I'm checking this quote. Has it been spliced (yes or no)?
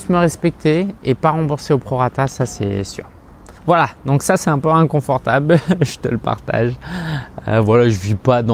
yes